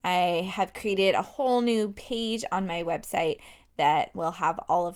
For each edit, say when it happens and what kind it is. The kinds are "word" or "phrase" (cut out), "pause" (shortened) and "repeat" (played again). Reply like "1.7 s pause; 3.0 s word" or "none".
none